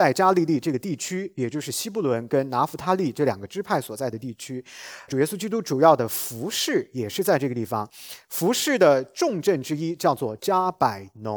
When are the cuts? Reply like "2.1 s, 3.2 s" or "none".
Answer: 5.1 s